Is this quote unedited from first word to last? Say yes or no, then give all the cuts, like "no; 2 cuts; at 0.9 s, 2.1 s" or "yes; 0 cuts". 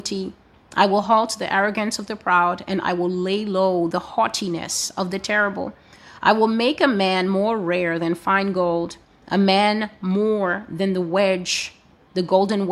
yes; 0 cuts